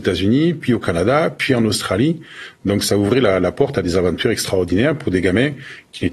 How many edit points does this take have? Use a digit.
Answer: 0